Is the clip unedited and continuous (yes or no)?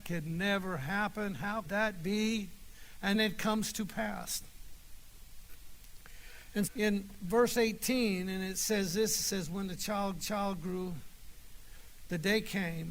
no